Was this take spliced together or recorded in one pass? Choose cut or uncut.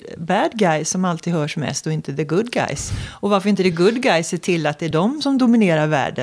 uncut